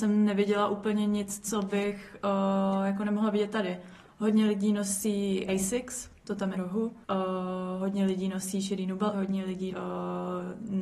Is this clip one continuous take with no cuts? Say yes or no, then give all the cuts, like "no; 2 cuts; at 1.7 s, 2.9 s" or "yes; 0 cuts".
no; 6 cuts; at 5.5 s, 6.2 s, 6.5 s, 7.0 s, 9.1 s, 9.7 s